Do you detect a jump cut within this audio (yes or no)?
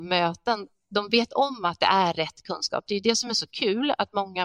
no